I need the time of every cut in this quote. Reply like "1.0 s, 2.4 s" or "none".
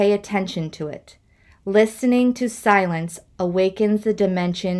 none